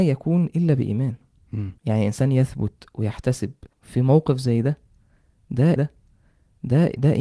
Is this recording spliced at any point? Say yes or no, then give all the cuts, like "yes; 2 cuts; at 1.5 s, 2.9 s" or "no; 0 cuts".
yes; 3 cuts; at 1.8 s, 3.7 s, 5.8 s